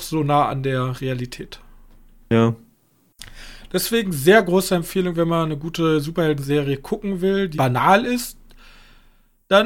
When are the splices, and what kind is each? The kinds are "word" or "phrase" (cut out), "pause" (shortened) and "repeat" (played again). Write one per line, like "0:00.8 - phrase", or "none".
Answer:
0:07.5 - word